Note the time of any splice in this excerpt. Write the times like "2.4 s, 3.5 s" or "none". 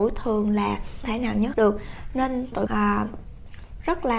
1.0 s, 1.5 s, 2.7 s